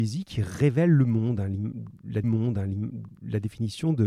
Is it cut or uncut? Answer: cut